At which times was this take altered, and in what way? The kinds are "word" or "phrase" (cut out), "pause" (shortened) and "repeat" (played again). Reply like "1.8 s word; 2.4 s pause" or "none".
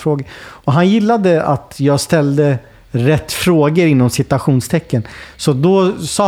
none